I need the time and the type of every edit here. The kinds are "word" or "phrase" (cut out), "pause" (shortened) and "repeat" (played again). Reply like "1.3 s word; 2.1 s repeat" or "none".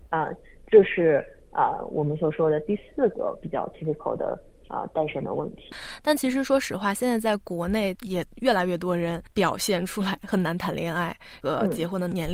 none

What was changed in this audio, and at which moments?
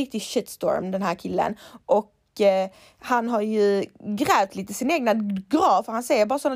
none

